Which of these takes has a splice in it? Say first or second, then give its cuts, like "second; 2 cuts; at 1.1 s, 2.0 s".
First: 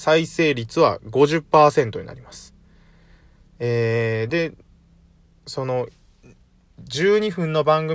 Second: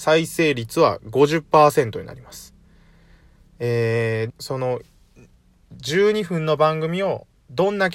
second; 1 cut; at 4.3 s